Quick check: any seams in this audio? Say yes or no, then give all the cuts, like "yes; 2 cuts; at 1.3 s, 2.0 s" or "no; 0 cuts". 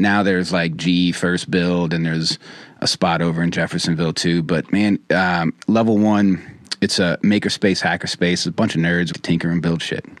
yes; 3 cuts; at 2.8 s, 5.6 s, 9.1 s